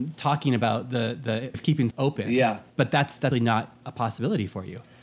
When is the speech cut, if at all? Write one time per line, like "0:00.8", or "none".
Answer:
0:01.5
0:01.9
0:02.7
0:03.3